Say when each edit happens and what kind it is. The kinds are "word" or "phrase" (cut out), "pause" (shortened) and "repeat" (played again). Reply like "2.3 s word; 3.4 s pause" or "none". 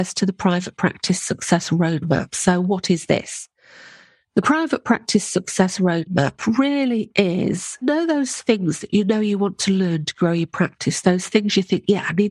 7.8 s word